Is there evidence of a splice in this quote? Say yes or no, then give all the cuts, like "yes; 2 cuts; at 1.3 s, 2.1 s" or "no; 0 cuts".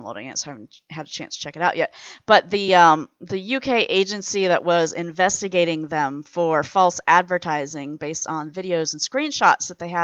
no; 0 cuts